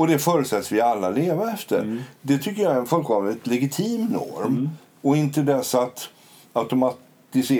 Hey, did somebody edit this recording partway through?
no; 0 cuts

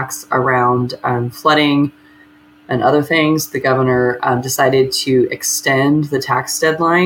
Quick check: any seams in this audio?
no; 0 cuts

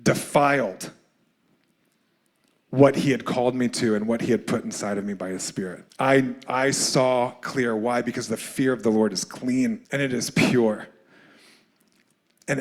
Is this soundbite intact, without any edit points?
no; 2 cuts; at 5.9 s, 9.8 s

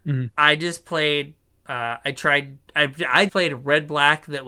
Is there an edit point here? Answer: yes; 3 cuts; at 1.4 s, 2.7 s, 3.3 s

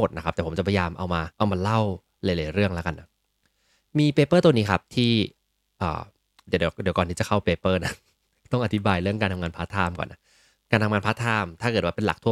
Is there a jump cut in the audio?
yes; 1 cut; at 1.3 s

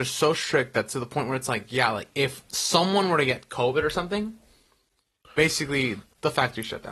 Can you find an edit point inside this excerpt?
no; 0 cuts

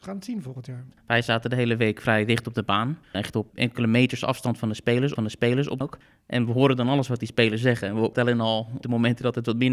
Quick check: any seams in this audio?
yes; 6 cuts; at 3.0 s, 3.5 s, 5.2 s, 5.8 s, 8.1 s, 8.8 s

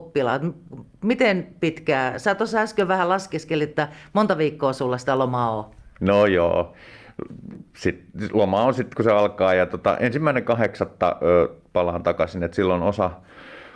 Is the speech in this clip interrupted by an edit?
no; 0 cuts

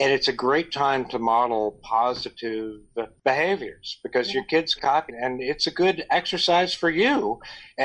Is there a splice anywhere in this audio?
yes; 2 cuts; at 4.8 s, 5.1 s

